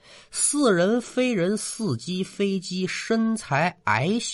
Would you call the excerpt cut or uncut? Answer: uncut